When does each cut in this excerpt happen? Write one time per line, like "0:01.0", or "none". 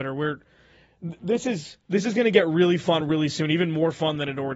none